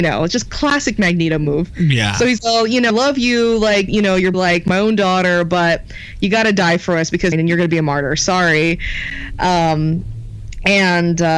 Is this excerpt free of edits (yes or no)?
no